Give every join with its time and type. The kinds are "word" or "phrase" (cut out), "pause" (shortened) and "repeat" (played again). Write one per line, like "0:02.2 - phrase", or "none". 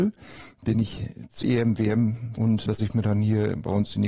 0:01.4 - word
0:02.4 - word
0:02.8 - word